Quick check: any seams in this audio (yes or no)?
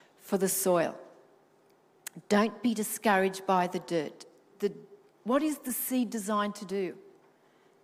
no